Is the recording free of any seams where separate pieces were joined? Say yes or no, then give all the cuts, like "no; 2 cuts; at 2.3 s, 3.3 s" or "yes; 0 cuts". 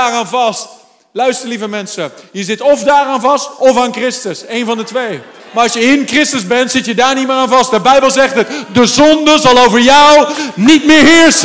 no; 1 cut; at 5.4 s